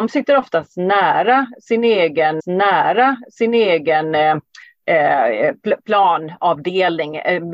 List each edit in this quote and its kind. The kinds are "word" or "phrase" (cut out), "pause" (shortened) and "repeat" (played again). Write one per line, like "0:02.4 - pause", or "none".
0:02.4 - repeat